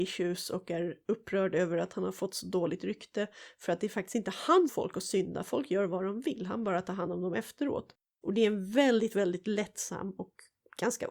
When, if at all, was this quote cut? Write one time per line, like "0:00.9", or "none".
0:04.7

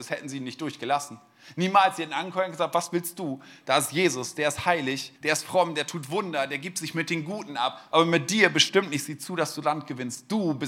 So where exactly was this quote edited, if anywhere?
0:05.2

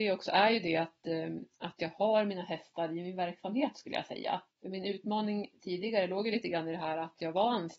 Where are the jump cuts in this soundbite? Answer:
0:01.5
0:04.5

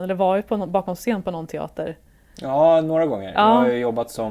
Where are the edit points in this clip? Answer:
none

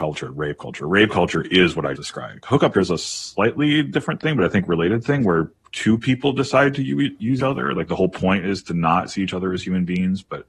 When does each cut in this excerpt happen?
0:02.0
0:02.7
0:07.4

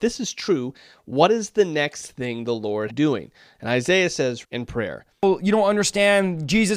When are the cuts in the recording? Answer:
0:02.9
0:04.4

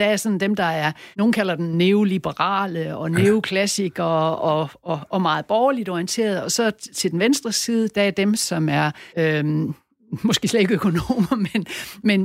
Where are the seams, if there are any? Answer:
0:01.1
0:09.1

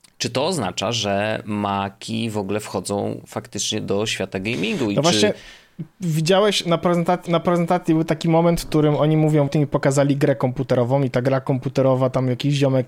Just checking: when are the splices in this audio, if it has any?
0:07.3
0:09.5

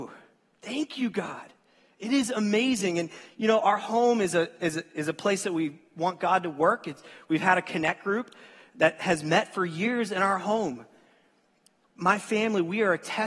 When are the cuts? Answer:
none

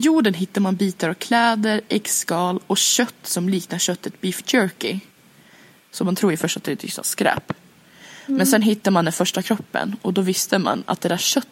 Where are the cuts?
none

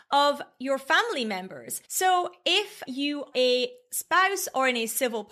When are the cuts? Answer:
0:01.8
0:02.9
0:03.3

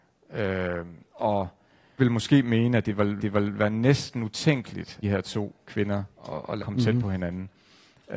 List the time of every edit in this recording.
0:02.0
0:03.2
0:05.0
0:06.1
0:06.6

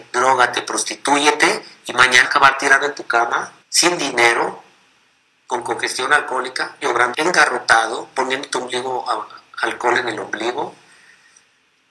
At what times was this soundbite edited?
0:02.2
0:03.6
0:06.8
0:07.1

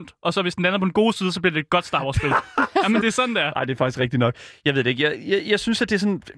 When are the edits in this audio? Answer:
0:03.0

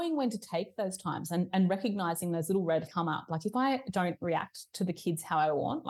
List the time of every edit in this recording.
0:02.9

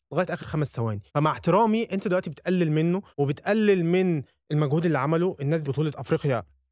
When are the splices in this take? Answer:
0:01.1
0:03.1
0:05.6

